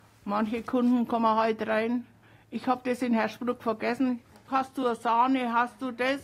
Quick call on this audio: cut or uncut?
uncut